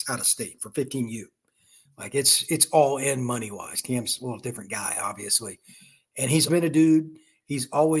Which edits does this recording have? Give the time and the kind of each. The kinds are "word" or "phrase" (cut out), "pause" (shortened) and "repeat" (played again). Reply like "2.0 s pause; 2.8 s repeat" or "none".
6.5 s word